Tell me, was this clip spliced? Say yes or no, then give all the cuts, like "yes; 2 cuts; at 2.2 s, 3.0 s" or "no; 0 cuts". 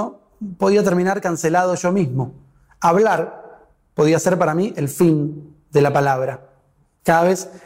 no; 0 cuts